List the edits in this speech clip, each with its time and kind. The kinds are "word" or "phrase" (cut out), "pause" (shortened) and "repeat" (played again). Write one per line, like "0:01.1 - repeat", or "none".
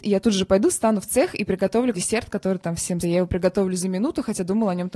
0:01.9 - word
0:03.0 - phrase